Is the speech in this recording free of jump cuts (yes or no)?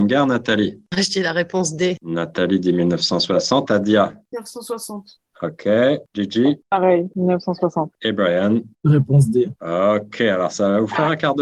no